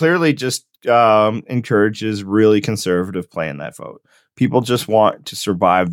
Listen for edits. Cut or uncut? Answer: uncut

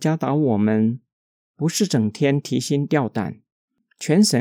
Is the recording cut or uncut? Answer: uncut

